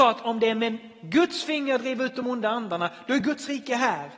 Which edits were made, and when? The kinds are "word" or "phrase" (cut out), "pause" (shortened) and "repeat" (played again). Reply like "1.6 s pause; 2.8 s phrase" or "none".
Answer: none